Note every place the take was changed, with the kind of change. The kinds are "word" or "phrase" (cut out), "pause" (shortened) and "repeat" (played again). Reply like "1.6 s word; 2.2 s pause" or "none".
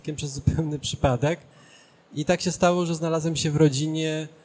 none